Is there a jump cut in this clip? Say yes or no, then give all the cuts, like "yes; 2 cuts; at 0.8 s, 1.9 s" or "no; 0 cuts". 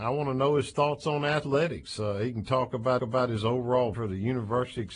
yes; 2 cuts; at 3.0 s, 3.9 s